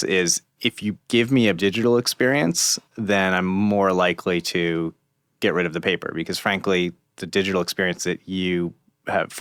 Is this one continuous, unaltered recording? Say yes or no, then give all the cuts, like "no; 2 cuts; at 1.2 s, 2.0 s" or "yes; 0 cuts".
no; 1 cut; at 1.6 s